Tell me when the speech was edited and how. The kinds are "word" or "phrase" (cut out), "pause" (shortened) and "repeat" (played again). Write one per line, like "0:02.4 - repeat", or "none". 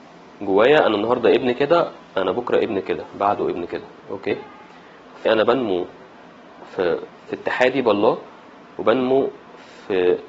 0:05.3 - word
0:07.3 - word